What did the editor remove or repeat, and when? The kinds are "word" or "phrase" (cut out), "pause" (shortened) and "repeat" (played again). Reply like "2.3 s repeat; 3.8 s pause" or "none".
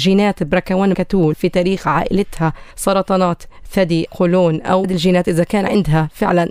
0.9 s word; 1.3 s phrase; 2.7 s pause; 4.1 s word; 4.8 s phrase